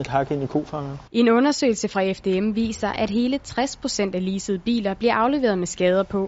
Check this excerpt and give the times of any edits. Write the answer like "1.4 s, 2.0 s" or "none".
1.1 s